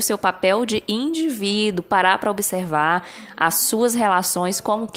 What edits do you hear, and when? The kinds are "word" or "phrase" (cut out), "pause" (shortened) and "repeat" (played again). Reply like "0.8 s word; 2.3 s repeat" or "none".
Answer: none